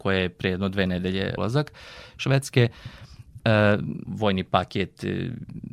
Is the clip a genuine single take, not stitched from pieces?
no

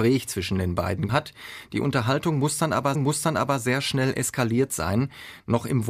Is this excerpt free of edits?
no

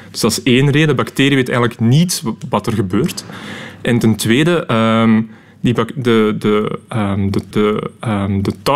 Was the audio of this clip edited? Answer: yes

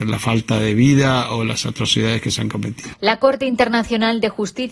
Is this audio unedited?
yes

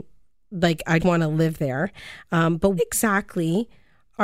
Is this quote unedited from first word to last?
no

